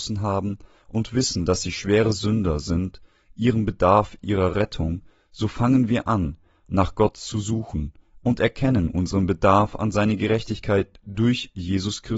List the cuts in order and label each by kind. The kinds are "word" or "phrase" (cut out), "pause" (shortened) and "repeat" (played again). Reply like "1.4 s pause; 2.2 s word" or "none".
none